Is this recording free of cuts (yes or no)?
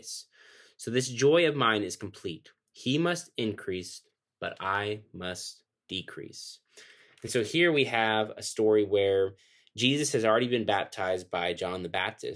yes